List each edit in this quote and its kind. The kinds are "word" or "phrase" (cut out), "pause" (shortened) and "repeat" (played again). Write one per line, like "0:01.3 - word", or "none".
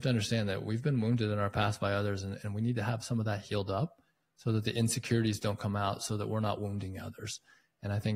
none